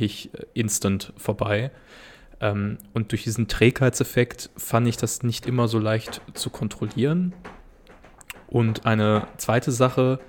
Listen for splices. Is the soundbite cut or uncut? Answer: uncut